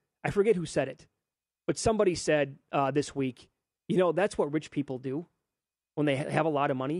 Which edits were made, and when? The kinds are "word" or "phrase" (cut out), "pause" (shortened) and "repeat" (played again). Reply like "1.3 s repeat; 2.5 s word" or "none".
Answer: none